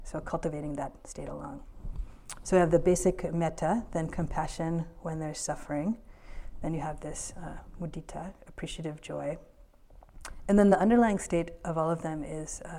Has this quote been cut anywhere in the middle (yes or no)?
no